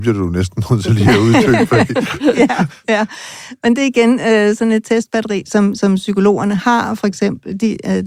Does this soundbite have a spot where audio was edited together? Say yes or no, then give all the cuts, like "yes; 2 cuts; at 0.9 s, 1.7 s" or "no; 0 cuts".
no; 0 cuts